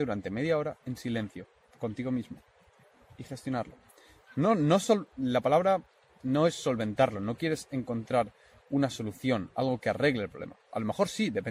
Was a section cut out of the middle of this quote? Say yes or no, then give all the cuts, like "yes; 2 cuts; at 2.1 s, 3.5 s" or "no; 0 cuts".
no; 0 cuts